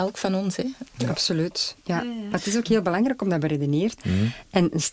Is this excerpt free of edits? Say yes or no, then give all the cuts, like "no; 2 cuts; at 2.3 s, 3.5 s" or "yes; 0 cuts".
no; 1 cut; at 4.0 s